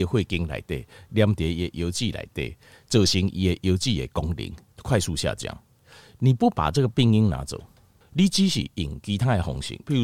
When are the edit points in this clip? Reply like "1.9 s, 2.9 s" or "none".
none